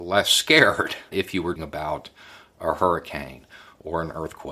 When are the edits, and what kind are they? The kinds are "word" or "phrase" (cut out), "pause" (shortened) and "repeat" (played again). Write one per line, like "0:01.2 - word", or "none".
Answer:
0:01.1 - word
0:01.6 - word